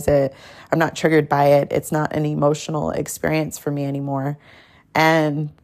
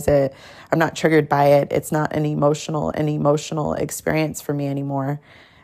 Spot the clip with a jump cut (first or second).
second